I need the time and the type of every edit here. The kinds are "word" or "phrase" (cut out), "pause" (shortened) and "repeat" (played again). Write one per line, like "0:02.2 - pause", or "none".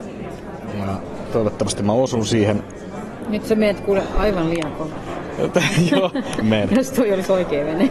0:06.4 - word